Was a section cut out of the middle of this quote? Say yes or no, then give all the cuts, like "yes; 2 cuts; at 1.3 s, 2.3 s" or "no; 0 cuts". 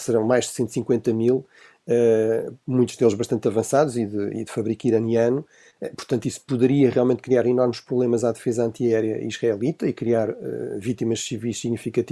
no; 0 cuts